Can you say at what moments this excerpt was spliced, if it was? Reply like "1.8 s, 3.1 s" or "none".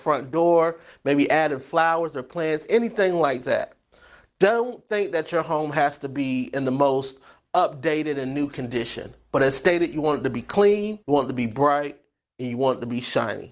11.0 s